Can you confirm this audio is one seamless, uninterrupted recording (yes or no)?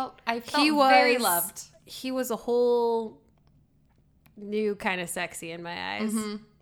yes